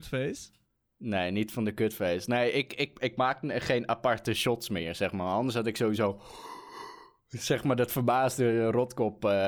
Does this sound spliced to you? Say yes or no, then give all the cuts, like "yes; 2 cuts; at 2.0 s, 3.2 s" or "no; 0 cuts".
no; 0 cuts